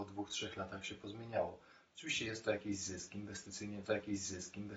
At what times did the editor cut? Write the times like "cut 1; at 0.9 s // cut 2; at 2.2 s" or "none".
cut 1; at 3.8 s